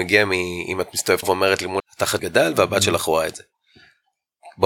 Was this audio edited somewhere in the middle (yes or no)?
yes